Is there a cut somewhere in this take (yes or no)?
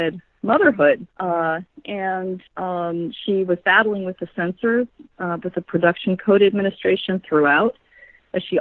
yes